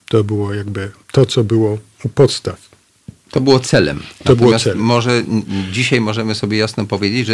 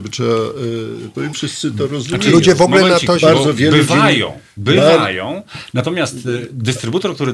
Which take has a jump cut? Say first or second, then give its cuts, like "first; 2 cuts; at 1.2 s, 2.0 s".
second; 1 cut; at 1.3 s